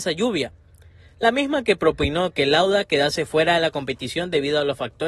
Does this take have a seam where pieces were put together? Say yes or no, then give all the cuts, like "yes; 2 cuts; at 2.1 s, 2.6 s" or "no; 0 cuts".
no; 0 cuts